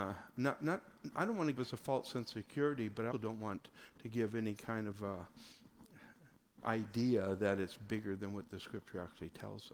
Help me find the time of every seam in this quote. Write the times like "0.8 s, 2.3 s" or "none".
1.6 s, 3.1 s